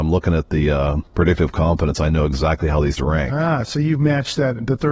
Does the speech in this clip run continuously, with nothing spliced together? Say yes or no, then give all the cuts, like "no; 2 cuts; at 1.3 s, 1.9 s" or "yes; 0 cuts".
no; 2 cuts; at 1.1 s, 3.0 s